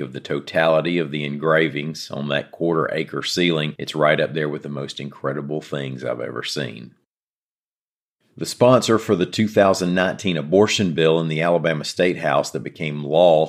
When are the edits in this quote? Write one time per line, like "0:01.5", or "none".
none